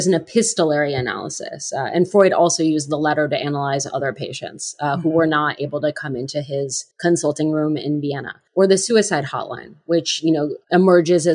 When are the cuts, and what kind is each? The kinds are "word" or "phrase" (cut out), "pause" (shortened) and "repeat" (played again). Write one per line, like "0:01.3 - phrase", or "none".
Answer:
0:06.9 - pause
0:08.5 - pause